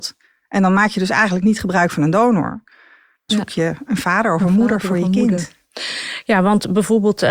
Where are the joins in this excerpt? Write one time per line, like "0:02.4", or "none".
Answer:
0:03.3